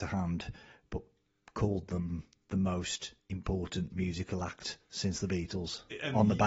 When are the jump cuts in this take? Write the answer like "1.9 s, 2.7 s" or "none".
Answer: none